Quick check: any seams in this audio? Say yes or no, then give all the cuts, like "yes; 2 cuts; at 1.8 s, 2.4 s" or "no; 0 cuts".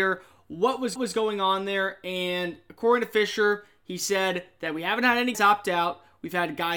yes; 2 cuts; at 1.0 s, 5.3 s